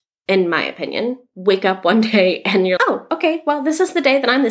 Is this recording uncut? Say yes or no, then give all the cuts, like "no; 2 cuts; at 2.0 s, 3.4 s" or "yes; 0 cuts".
no; 1 cut; at 2.8 s